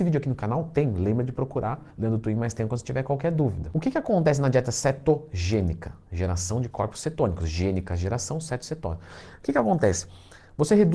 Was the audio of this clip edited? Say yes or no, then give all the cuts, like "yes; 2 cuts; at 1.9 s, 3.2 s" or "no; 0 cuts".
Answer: yes; 1 cut; at 1.9 s